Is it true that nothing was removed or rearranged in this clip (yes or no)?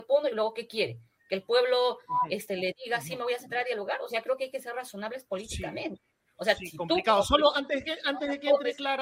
yes